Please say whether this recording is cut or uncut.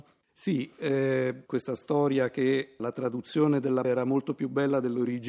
cut